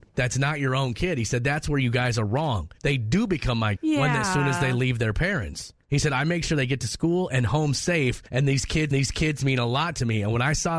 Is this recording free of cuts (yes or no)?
no